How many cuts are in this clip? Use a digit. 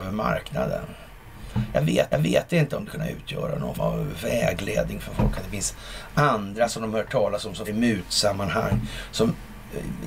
4